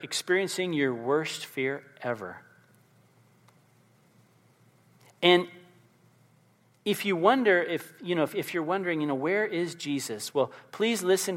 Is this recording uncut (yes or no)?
yes